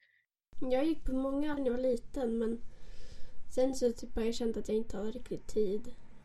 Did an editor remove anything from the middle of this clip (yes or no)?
yes